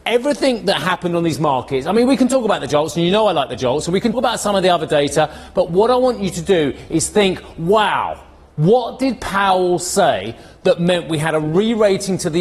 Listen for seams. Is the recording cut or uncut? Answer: cut